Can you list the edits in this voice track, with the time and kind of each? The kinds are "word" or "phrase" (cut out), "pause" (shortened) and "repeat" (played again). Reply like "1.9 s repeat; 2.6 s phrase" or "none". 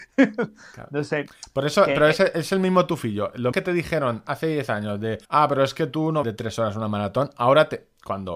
3.5 s word; 5.2 s pause; 6.2 s word